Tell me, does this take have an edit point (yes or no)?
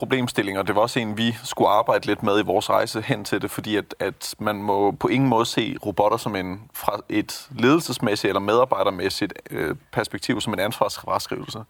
no